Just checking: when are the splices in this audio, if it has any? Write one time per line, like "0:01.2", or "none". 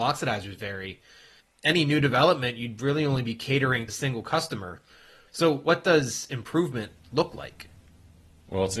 0:03.9